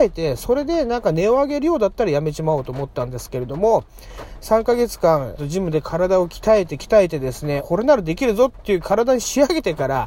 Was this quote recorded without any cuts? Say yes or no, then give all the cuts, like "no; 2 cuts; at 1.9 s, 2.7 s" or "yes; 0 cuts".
no; 2 cuts; at 5.4 s, 7.6 s